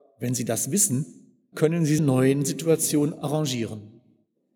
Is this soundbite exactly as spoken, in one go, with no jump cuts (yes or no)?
no